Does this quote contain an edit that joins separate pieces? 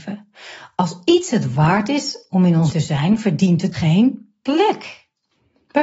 yes; 2 cuts; at 2.7 s, 3.7 s

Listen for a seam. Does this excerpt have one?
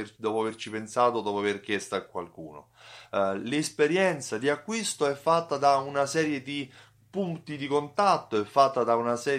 no; 0 cuts

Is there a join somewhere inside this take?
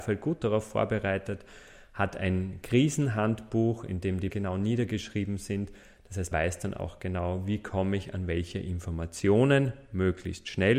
yes; 2 cuts; at 4.3 s, 6.3 s

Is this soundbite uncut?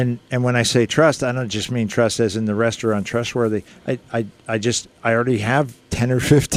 yes; 0 cuts

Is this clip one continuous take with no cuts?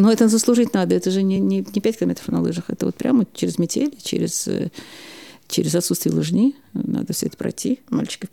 yes; 0 cuts

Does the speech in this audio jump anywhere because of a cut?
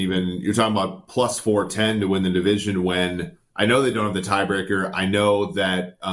no; 0 cuts

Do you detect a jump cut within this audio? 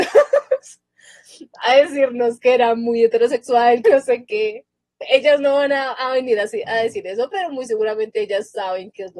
yes; 1 cut; at 3.8 s

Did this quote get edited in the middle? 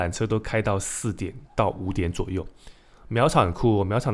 no; 0 cuts

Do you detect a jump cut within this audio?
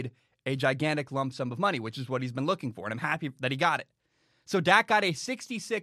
no; 0 cuts

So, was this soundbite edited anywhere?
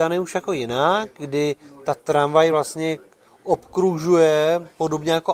no; 0 cuts

